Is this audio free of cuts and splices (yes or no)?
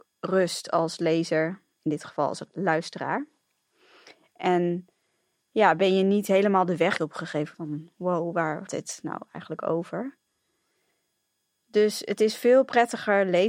no